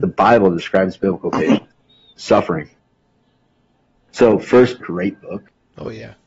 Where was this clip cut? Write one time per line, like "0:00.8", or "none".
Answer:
0:02.2
0:04.8